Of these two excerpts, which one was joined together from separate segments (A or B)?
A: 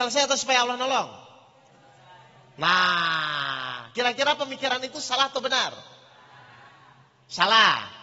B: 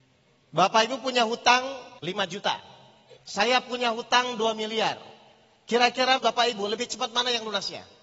B